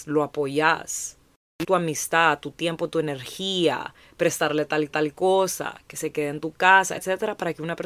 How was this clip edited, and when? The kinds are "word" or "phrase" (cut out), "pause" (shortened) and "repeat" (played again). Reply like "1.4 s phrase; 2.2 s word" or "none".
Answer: 1.6 s word; 4.9 s repeat; 7.0 s word